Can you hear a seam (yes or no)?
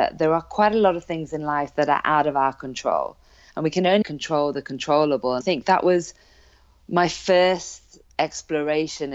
yes